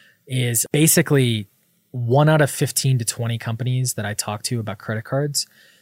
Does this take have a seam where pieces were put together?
no; 0 cuts

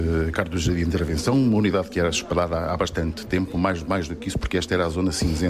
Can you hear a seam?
no; 0 cuts

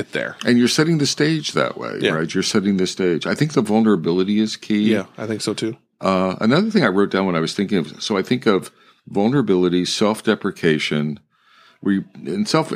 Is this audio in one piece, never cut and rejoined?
yes; 0 cuts

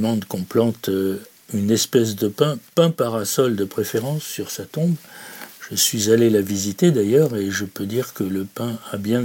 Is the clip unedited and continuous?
yes; 0 cuts

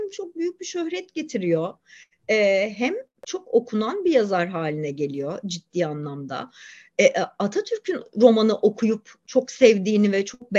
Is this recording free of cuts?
yes; 0 cuts

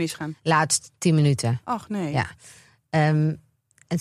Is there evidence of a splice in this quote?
no; 0 cuts

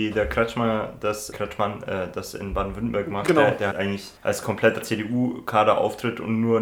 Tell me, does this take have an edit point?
yes; 4 cuts; at 1.3 s, 3.7 s, 4.2 s, 4.8 s

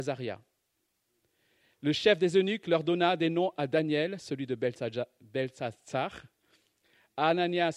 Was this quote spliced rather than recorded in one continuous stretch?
no; 0 cuts

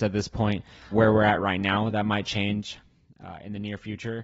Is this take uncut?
no; 1 cut; at 0.9 s

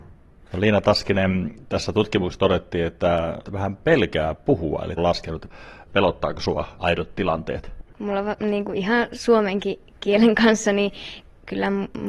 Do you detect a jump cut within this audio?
yes; 2 cuts; at 3.4 s, 5.0 s

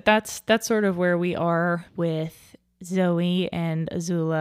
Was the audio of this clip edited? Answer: yes; 1 cut; at 1.9 s

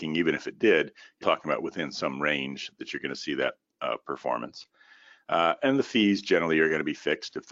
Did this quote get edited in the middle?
yes; 1 cut; at 1.2 s

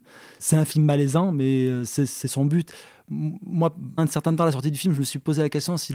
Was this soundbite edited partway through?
yes; 1 cut; at 4.0 s

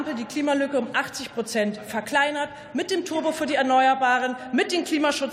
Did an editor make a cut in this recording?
no; 0 cuts

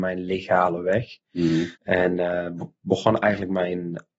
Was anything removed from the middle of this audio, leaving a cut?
yes; 1 cut; at 1.8 s

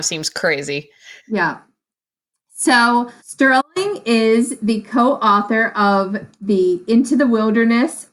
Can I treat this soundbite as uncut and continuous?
no; 2 cuts; at 1.2 s, 3.2 s

